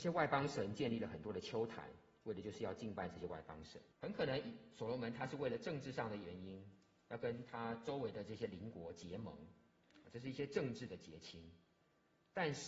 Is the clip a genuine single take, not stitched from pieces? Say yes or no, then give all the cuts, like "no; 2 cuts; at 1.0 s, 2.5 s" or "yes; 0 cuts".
no; 1 cut; at 3.9 s